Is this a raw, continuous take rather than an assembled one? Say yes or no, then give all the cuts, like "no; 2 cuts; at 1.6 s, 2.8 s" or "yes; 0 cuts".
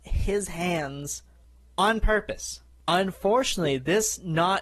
yes; 0 cuts